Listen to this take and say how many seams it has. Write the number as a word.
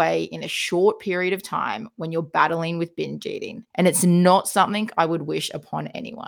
one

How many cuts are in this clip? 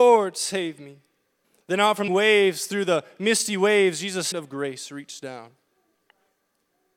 three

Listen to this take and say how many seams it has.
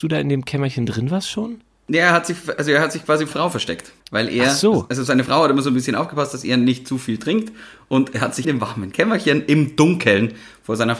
three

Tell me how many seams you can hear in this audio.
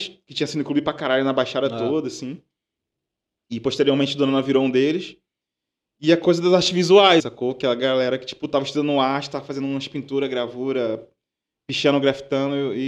one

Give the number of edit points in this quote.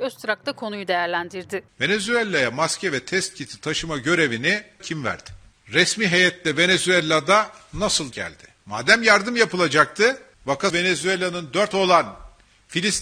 four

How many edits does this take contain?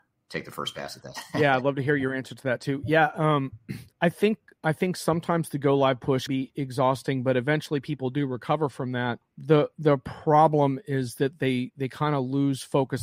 three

